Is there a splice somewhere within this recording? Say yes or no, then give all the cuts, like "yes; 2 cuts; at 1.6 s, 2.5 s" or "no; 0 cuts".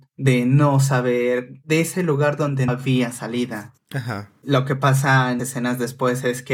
yes; 2 cuts; at 2.7 s, 5.4 s